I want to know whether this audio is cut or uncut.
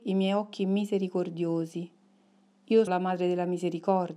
cut